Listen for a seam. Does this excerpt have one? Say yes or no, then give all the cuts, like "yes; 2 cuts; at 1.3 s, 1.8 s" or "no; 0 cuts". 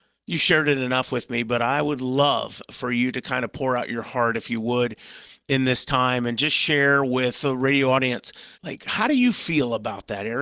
yes; 1 cut; at 8.5 s